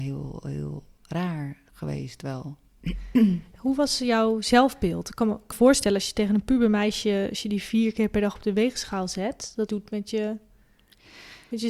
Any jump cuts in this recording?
yes; 2 cuts; at 5.5 s, 9.7 s

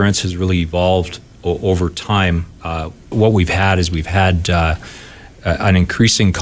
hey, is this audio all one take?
no; 1 cut; at 3.1 s

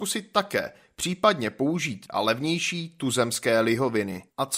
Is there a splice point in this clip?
yes; 1 cut; at 2.1 s

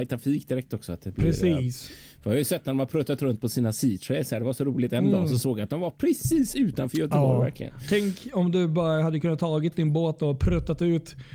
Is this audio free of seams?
yes; 0 cuts

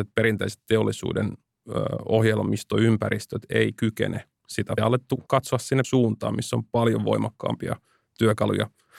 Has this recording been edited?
yes; 3 cuts; at 4.8 s, 5.3 s, 5.8 s

